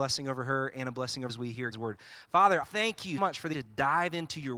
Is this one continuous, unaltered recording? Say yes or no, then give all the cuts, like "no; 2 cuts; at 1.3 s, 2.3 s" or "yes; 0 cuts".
no; 5 cuts; at 1.3 s, 1.7 s, 2.6 s, 3.2 s, 3.5 s